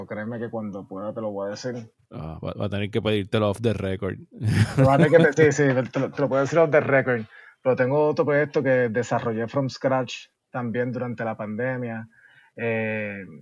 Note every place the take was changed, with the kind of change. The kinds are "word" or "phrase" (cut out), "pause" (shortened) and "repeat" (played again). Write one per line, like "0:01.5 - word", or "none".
none